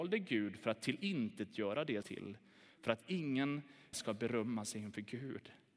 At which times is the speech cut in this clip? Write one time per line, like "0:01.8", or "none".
0:02.0
0:03.9